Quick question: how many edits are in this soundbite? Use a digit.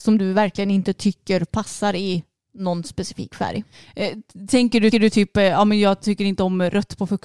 1